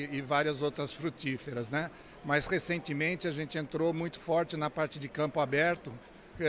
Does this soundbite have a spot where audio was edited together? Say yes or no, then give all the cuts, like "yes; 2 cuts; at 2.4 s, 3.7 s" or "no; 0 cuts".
no; 0 cuts